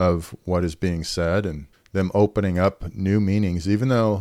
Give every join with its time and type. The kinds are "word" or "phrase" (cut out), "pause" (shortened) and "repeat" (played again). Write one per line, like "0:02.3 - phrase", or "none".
0:01.7 - pause